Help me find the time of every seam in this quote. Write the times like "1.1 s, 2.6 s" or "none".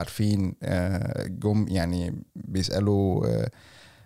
2.3 s